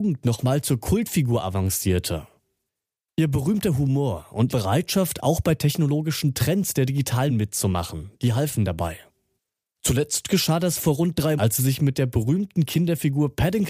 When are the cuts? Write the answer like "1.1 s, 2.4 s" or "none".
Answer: 4.5 s, 7.3 s, 11.4 s